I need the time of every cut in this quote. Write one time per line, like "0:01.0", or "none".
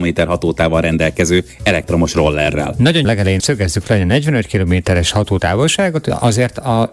0:03.0
0:03.4